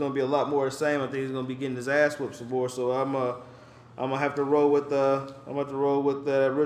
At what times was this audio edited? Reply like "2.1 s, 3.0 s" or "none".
none